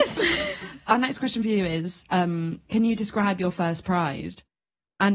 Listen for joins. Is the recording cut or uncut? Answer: cut